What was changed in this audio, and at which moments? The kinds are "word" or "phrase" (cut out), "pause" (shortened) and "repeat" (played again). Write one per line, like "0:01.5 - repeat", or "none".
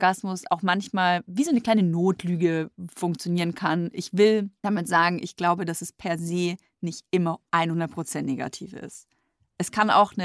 none